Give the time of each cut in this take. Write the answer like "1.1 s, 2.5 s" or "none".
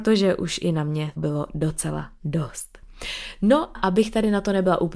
1.2 s, 3.7 s